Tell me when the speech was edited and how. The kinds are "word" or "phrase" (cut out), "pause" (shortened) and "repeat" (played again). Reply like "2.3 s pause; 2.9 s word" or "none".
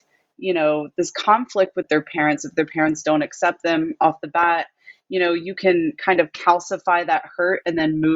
none